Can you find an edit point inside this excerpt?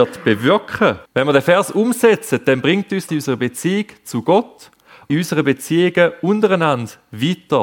yes; 3 cuts; at 1.1 s, 3.1 s, 5.1 s

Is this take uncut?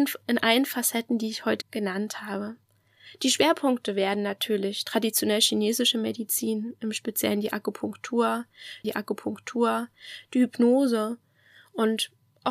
no; 2 cuts; at 1.6 s, 8.8 s

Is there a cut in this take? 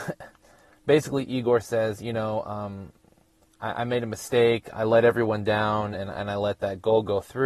no; 0 cuts

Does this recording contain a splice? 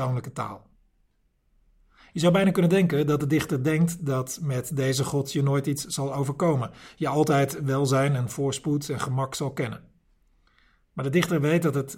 no; 0 cuts

